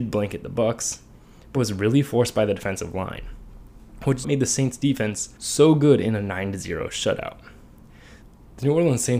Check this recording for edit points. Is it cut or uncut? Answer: cut